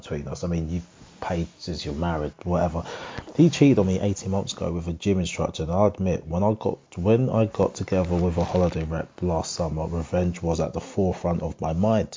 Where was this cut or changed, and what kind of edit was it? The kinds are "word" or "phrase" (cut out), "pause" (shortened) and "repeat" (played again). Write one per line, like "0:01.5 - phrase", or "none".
0:02.3 - word
0:06.9 - pause